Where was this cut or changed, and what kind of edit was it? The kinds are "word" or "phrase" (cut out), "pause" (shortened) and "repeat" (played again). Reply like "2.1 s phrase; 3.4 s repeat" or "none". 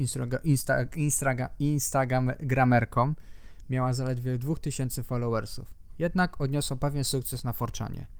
none